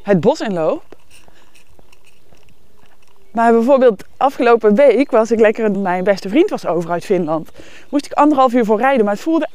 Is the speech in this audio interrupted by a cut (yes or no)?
yes